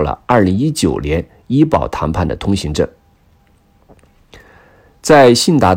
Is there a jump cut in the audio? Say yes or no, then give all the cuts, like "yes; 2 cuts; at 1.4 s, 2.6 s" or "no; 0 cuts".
no; 0 cuts